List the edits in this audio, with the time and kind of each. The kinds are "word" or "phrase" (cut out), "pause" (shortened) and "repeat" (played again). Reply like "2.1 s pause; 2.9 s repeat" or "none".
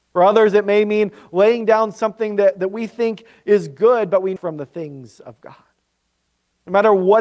4.4 s phrase